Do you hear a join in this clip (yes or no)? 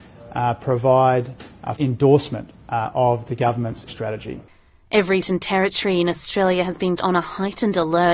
yes